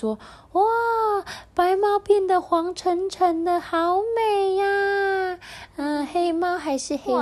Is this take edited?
no; 0 cuts

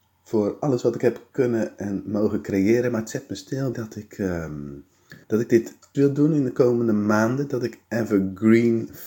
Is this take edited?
yes; 3 cuts; at 3.7 s, 5.2 s, 5.9 s

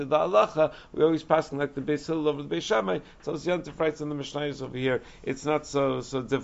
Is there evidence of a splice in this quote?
no; 0 cuts

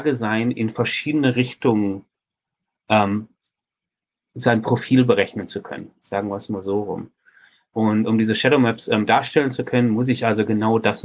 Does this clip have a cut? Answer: no; 0 cuts

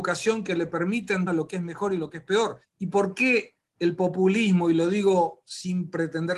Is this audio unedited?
no; 3 cuts; at 1.3 s, 2.6 s, 3.7 s

